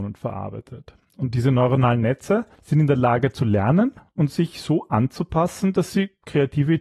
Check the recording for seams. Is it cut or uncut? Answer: cut